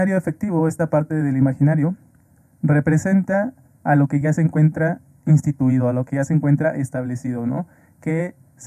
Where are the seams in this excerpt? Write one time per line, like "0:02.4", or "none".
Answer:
none